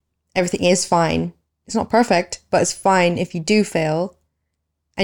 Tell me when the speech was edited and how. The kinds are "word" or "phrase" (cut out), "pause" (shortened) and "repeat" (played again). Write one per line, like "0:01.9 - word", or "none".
none